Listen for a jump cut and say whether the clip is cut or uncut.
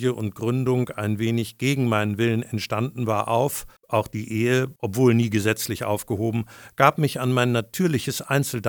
cut